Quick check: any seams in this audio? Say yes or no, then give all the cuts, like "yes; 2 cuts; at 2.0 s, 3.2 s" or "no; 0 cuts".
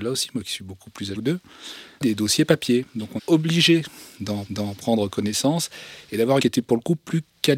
yes; 5 cuts; at 1.1 s, 2.0 s, 3.2 s, 4.5 s, 6.4 s